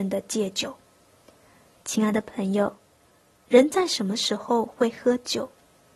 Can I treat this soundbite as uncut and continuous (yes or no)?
yes